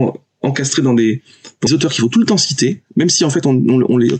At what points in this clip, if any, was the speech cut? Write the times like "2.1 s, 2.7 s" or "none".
1.7 s